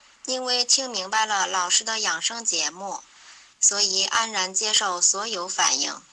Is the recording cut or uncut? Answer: uncut